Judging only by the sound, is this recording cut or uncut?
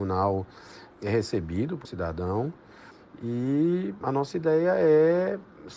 cut